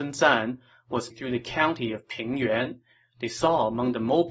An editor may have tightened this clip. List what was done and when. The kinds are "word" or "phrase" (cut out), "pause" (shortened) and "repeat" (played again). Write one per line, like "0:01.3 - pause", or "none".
0:01.1 - word